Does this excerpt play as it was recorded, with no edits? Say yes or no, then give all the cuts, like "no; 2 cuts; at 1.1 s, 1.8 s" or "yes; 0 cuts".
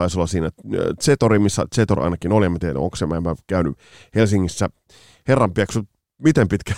yes; 0 cuts